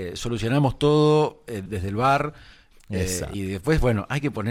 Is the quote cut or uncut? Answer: cut